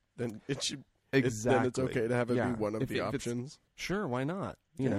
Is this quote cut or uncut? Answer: uncut